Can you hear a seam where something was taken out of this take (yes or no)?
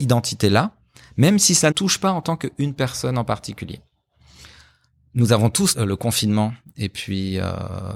yes